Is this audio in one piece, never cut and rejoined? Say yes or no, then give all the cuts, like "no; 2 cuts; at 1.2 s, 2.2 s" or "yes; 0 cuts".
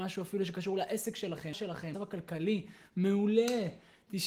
no; 2 cuts; at 1.5 s, 1.9 s